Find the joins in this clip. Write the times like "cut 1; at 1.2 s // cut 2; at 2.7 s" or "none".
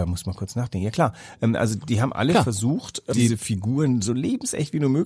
cut 1; at 3.1 s